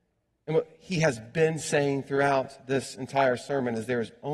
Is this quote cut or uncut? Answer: uncut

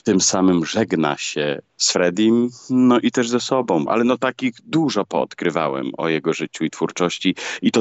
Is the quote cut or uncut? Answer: uncut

